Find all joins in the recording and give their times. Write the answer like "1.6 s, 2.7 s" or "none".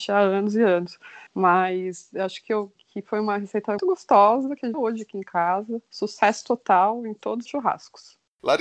1.3 s, 2.8 s, 3.8 s, 4.7 s, 5.9 s, 7.5 s